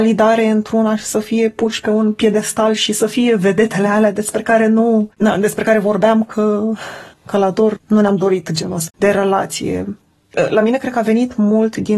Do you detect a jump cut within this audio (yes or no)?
yes